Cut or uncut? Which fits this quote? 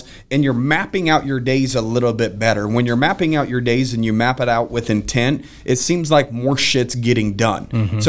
uncut